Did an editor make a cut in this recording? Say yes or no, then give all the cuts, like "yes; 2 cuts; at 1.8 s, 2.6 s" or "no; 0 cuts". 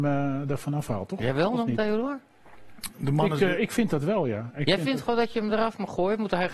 no; 0 cuts